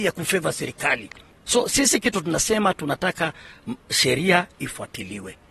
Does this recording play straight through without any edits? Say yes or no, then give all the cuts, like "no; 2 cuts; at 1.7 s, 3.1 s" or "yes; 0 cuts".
yes; 0 cuts